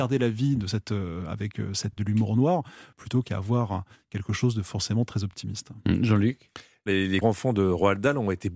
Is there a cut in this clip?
yes; 2 cuts; at 2.0 s, 7.2 s

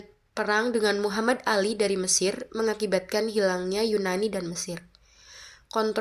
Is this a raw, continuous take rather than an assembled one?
yes; 0 cuts

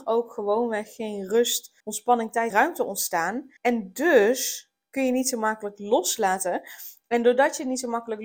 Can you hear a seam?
yes; 3 cuts; at 1.8 s, 2.5 s, 3.6 s

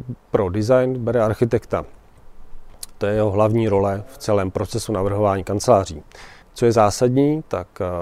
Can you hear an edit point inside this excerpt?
yes; 1 cut; at 6.4 s

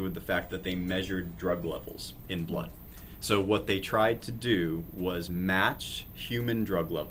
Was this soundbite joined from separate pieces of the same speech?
no; 0 cuts

